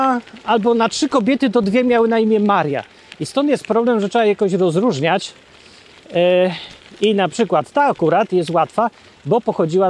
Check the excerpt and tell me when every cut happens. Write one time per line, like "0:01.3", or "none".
none